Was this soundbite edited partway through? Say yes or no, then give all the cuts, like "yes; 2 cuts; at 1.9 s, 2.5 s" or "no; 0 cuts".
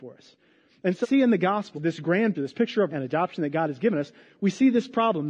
yes; 4 cuts; at 1.0 s, 1.7 s, 2.3 s, 2.9 s